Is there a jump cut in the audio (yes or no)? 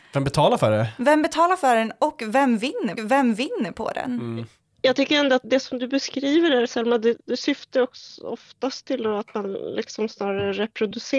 yes